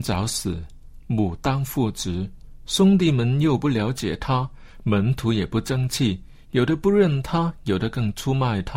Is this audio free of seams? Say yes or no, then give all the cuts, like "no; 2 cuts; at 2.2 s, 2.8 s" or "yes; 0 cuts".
yes; 0 cuts